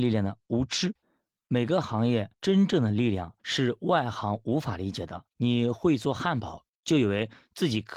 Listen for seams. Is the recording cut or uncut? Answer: cut